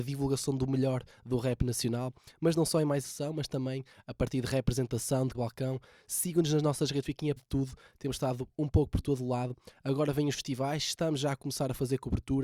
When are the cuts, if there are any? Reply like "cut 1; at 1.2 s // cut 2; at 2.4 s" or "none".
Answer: cut 1; at 3.0 s // cut 2; at 5.3 s // cut 3; at 7.0 s // cut 4; at 7.4 s